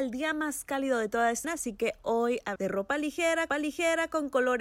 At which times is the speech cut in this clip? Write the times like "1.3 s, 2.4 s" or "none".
1.4 s, 2.6 s, 3.5 s

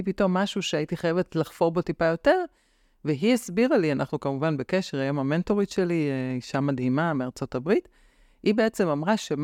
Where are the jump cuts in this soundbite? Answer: none

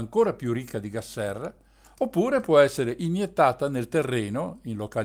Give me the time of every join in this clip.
none

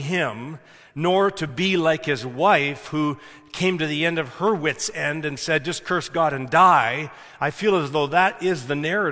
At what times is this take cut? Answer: none

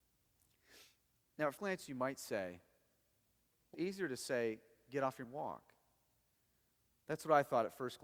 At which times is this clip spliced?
1.6 s, 3.7 s, 5.2 s

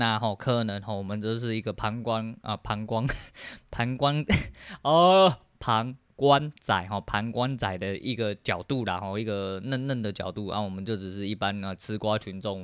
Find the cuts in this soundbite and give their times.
none

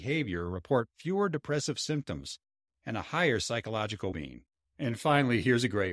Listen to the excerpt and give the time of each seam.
4.1 s

